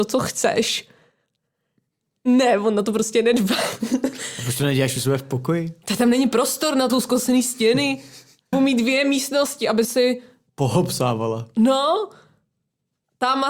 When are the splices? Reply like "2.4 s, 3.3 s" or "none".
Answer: 6.9 s, 8.5 s, 9.8 s